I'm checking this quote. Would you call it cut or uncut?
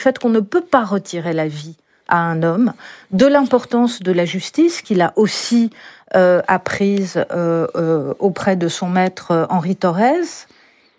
uncut